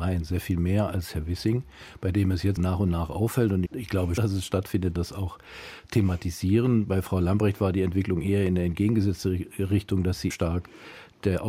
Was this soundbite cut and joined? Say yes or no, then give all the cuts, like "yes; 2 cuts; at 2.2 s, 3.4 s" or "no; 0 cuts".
yes; 5 cuts; at 2.6 s, 3.7 s, 4.2 s, 5.0 s, 10.3 s